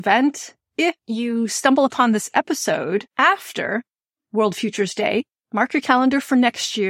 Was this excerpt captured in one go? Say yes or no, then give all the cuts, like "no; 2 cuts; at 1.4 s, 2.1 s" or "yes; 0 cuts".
no; 2 cuts; at 1.0 s, 3.1 s